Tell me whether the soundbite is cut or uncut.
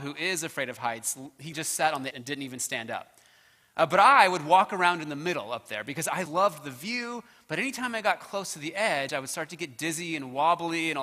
cut